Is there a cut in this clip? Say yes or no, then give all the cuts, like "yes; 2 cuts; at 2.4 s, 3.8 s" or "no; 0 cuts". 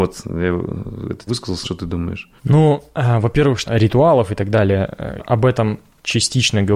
yes; 5 cuts; at 1.3 s, 1.6 s, 2.4 s, 3.7 s, 5.2 s